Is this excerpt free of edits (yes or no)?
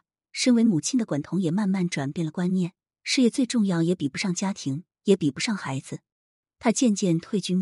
yes